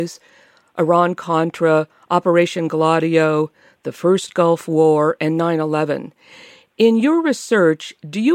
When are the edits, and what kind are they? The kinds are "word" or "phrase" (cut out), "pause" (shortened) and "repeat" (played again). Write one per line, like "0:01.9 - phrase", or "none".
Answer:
none